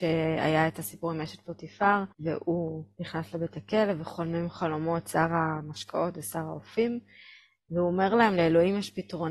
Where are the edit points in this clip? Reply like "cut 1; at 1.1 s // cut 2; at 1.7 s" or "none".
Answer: cut 1; at 2.1 s

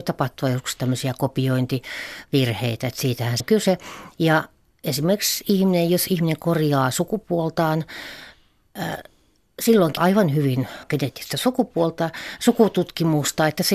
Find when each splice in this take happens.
cut 1; at 3.4 s // cut 2; at 10.0 s // cut 3; at 10.8 s

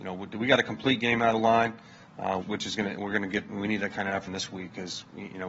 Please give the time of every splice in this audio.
cut 1; at 1.3 s // cut 2; at 2.4 s // cut 3; at 3.5 s // cut 4; at 4.3 s

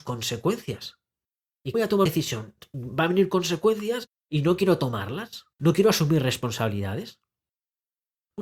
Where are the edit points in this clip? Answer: cut 1; at 1.7 s // cut 2; at 2.1 s // cut 3; at 5.5 s

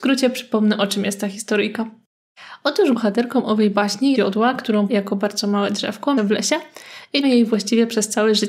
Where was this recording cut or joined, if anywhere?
cut 1; at 2.9 s // cut 2; at 4.1 s // cut 3; at 4.9 s // cut 4; at 6.2 s // cut 5; at 7.2 s

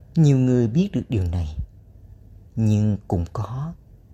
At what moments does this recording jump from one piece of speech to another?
none

